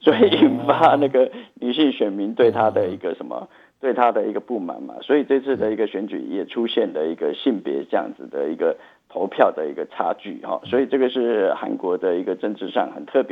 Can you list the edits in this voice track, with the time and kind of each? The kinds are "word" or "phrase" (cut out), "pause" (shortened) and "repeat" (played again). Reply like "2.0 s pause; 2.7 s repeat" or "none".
none

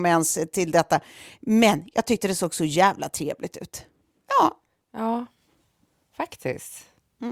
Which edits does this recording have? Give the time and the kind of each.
none

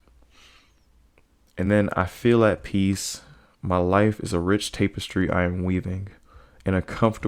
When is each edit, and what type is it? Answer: none

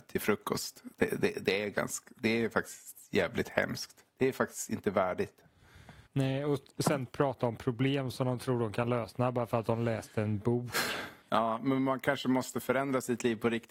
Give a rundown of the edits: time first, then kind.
4.1 s pause; 6.1 s pause

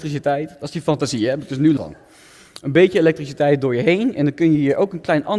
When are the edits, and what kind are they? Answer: 1.8 s word

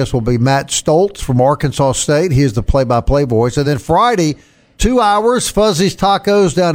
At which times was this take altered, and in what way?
none

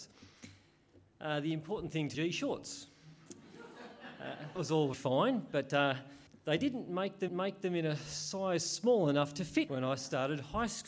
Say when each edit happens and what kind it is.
2.1 s phrase; 4.6 s word; 4.9 s word; 6.3 s pause; 7.3 s repeat; 9.7 s word

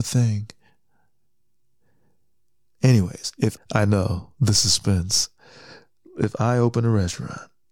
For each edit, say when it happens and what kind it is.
3.6 s word

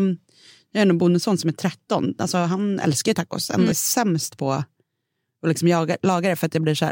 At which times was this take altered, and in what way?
3.7 s word

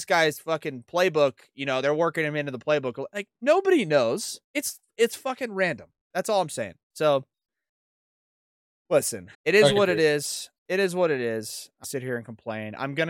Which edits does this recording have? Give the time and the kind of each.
4.4 s pause; 6.8 s pause; 9.3 s pause; 11.8 s phrase

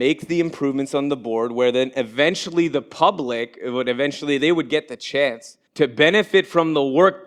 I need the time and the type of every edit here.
5.7 s pause

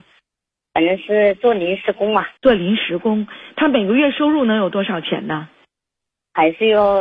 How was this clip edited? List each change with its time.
2.4 s pause

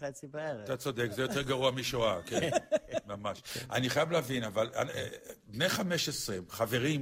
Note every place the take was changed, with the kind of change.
none

